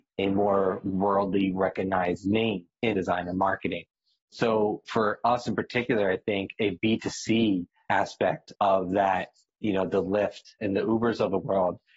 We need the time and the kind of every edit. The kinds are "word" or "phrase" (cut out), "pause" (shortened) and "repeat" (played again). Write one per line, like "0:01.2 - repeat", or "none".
0:02.9 - phrase